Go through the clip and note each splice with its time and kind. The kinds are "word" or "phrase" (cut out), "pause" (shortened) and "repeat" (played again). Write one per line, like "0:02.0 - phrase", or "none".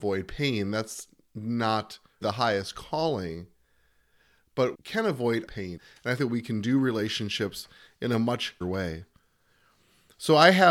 0:02.2 - word
0:04.7 - word
0:05.5 - word
0:05.8 - word
0:06.2 - word
0:08.6 - word